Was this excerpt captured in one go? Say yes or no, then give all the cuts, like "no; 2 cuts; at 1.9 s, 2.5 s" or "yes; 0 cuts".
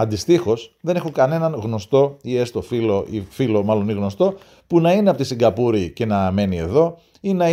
yes; 0 cuts